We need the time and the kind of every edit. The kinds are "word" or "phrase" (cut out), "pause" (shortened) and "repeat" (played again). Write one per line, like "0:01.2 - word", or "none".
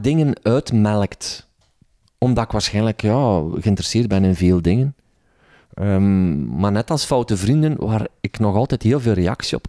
none